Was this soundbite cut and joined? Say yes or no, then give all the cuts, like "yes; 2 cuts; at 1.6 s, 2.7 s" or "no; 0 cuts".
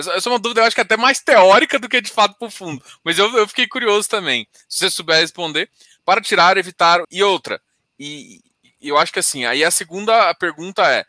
yes; 1 cut; at 7.0 s